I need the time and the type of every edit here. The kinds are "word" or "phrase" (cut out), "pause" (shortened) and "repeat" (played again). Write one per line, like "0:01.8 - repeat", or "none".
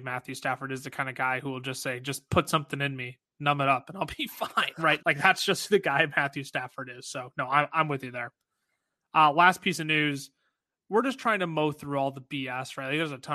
0:05.0 - word